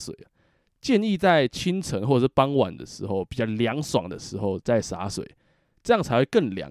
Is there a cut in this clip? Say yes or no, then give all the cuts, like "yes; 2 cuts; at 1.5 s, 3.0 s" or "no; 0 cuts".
no; 0 cuts